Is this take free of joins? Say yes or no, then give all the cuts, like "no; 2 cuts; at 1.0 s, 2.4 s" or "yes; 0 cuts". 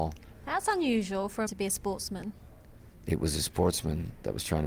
no; 1 cut; at 1.5 s